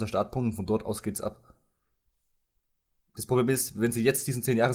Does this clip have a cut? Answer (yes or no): no